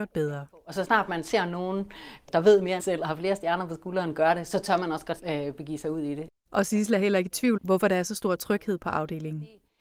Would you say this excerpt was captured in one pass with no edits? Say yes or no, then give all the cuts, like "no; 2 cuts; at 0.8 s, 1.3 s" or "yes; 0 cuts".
no; 4 cuts; at 2.3 s, 2.8 s, 5.2 s, 7.6 s